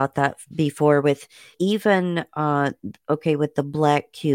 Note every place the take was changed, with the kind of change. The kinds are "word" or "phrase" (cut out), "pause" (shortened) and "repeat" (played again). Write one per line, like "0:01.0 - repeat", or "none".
0:01.5 - word